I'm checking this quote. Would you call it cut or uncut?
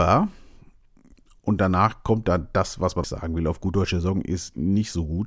cut